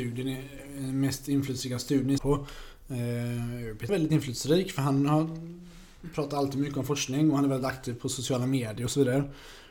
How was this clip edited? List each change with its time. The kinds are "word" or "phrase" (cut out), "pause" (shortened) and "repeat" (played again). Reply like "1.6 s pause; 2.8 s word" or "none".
2.2 s phrase; 3.9 s phrase